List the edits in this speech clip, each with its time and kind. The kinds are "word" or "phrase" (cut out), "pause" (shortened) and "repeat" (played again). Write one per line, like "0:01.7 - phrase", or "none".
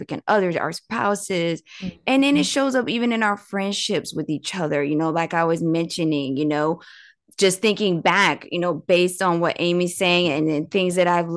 none

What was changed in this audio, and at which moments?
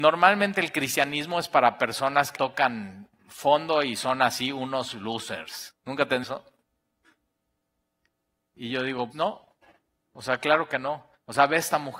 0:02.3 - word
0:05.8 - pause
0:06.2 - word
0:09.1 - word

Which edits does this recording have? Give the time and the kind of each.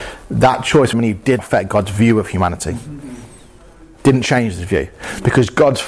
0:00.9 - word
0:01.4 - word

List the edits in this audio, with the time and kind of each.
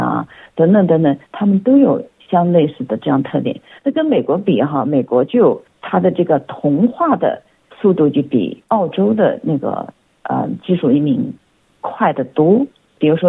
none

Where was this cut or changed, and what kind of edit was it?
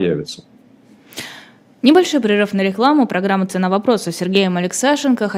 none

